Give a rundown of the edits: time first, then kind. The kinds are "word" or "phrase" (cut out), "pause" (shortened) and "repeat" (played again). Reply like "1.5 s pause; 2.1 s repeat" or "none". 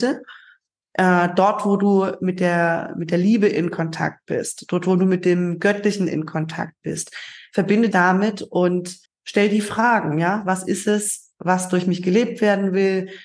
7.9 s word; 9.1 s pause